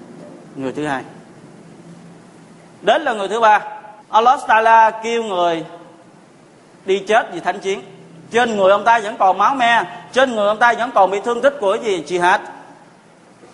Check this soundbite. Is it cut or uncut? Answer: cut